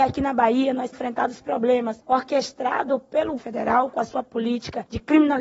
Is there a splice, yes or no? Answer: yes